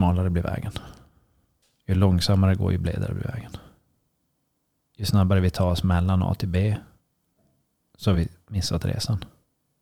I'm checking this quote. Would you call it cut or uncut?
uncut